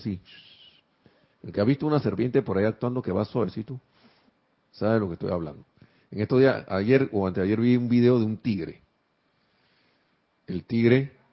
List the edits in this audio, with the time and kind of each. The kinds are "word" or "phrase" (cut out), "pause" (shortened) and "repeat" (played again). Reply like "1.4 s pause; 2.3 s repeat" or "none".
none